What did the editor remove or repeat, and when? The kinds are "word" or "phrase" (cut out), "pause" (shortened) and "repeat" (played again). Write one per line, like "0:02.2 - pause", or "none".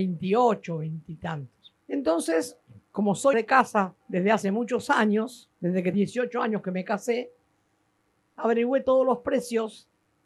0:01.8 - pause
0:03.3 - word
0:04.0 - pause
0:05.5 - pause
0:05.9 - word